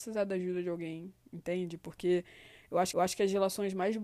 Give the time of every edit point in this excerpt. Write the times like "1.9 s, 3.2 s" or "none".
2.9 s